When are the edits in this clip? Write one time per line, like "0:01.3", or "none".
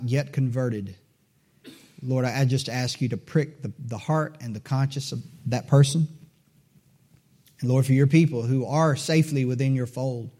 none